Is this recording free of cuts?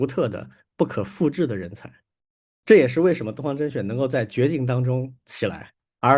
yes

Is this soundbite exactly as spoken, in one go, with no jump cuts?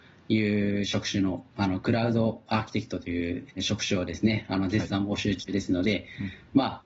no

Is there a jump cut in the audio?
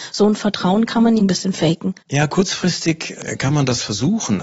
yes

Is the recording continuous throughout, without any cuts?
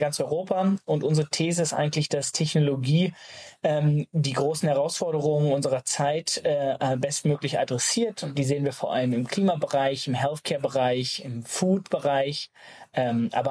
yes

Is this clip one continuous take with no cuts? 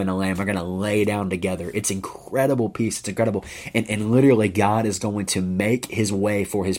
yes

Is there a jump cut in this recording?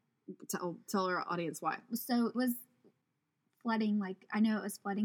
yes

